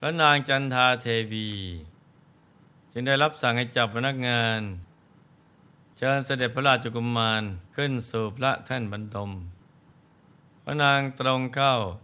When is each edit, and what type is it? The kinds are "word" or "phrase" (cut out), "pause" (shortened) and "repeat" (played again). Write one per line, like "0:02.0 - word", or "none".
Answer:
0:07.7 - pause

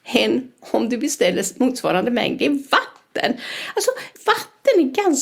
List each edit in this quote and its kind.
0:04.1 - pause

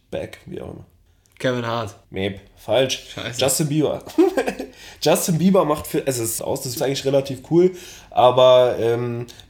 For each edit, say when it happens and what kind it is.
0:01.1 - pause
0:02.0 - pause
0:06.4 - phrase
0:06.8 - word

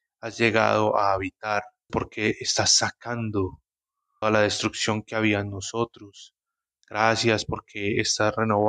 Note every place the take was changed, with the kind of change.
0:01.9 - word
0:04.2 - word

